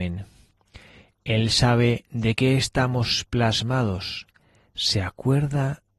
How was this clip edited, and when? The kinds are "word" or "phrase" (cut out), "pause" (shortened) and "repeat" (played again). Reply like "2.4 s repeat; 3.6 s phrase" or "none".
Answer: none